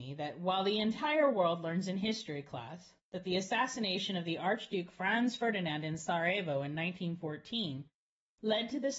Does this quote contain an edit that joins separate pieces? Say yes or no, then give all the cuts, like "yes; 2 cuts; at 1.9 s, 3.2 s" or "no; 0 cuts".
no; 0 cuts